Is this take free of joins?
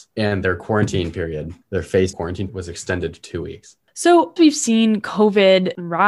no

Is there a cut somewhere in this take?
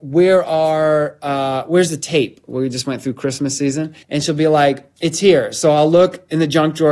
yes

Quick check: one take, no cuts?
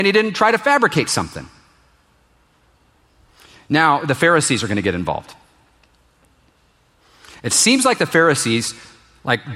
yes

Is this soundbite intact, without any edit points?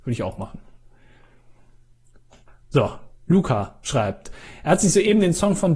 yes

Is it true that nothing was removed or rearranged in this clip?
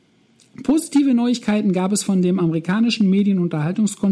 yes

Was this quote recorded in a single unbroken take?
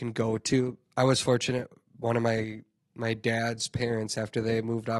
yes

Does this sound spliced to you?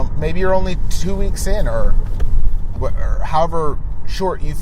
yes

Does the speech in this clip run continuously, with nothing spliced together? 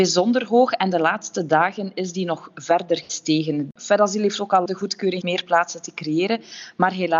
no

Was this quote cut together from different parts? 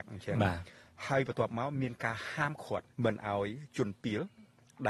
yes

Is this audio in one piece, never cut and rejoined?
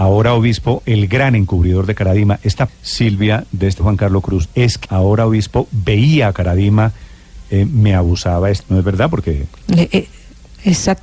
no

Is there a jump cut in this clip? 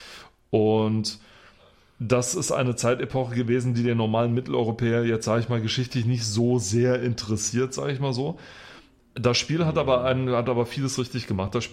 no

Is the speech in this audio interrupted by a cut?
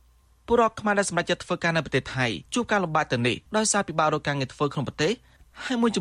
yes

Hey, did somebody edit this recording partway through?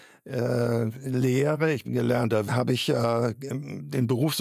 yes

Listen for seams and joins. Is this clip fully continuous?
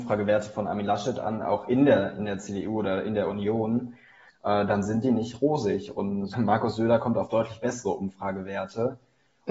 no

